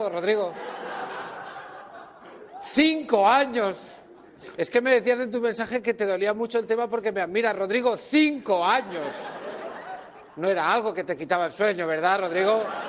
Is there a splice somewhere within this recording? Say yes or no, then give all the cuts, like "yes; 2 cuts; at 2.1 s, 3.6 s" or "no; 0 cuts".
no; 0 cuts